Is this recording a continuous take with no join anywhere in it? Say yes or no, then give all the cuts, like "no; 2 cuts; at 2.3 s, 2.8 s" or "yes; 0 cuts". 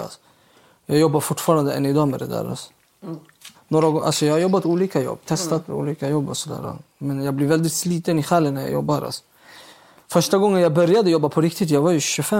yes; 0 cuts